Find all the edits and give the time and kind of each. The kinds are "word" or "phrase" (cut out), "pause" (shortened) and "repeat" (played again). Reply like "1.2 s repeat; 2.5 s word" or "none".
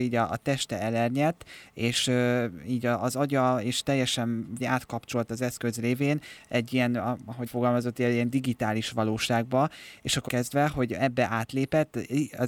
4.6 s word; 7.5 s word; 10.3 s word